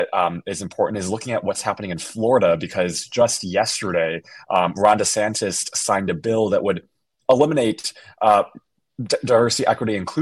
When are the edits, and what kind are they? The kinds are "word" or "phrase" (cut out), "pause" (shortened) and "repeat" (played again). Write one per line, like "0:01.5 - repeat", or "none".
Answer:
none